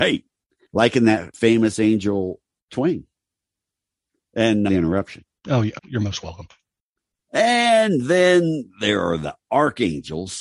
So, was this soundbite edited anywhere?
yes; 3 cuts; at 2.7 s, 4.7 s, 5.8 s

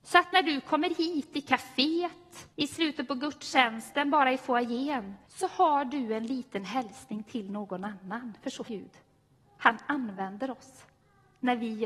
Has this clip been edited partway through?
yes; 3 cuts; at 2.5 s, 5.2 s, 8.7 s

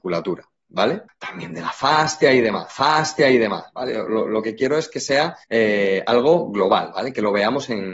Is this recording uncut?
no; 3 cuts; at 1.1 s, 2.7 s, 5.4 s

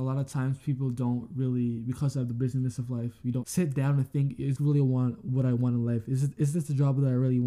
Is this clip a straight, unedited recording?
no; 2 cuts; at 3.4 s, 4.6 s

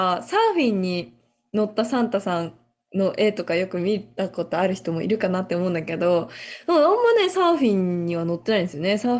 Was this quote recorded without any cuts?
yes; 0 cuts

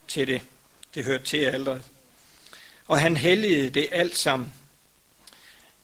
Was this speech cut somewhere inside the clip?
no; 0 cuts

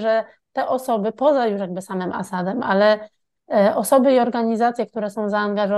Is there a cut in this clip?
no; 0 cuts

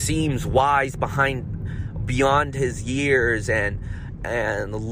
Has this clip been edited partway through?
no; 0 cuts

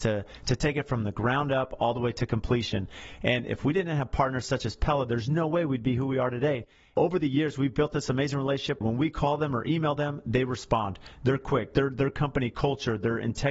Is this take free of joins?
yes; 0 cuts

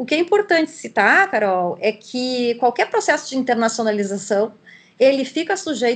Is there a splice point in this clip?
no; 0 cuts

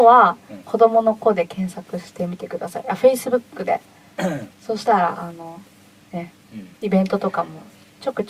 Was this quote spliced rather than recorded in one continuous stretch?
yes; 2 cuts; at 4.5 s, 6.7 s

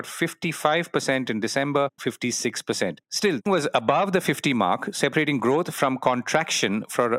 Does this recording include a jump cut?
yes; 3 cuts; at 2.0 s, 3.0 s, 3.5 s

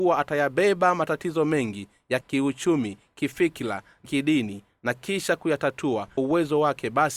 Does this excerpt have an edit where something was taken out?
yes; 3 cuts; at 2.2 s, 4.1 s, 6.2 s

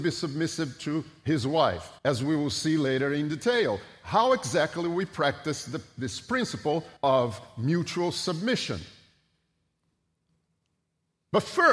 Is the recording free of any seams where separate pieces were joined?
no; 2 cuts; at 2.0 s, 7.0 s

